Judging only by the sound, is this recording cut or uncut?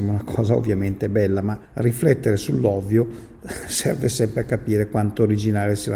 cut